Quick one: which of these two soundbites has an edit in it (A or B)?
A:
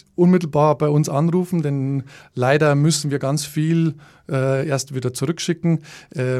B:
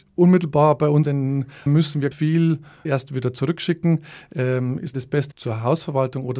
B